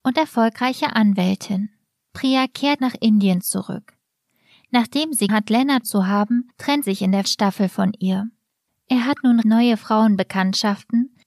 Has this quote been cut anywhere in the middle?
yes; 6 cuts; at 2.8 s, 5.3 s, 5.8 s, 6.8 s, 7.2 s, 9.4 s

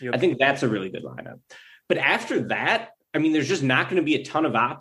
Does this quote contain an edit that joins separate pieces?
no; 0 cuts

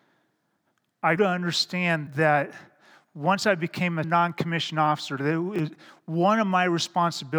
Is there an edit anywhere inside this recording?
yes; 3 cuts; at 1.2 s, 2.1 s, 4.0 s

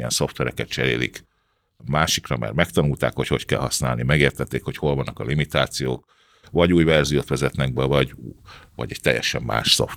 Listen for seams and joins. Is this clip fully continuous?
yes; 0 cuts

